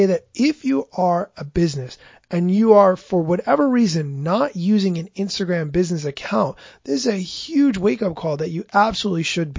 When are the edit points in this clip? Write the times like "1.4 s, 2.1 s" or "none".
none